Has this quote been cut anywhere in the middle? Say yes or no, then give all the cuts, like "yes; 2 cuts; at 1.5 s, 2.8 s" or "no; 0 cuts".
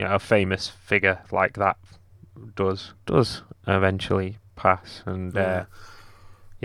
yes; 1 cut; at 3.0 s